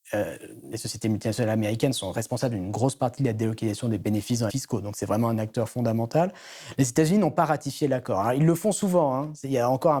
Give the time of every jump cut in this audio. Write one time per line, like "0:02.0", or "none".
0:04.5